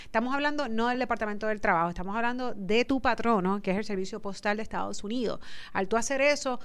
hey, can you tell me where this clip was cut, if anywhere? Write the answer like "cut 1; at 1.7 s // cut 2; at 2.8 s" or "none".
none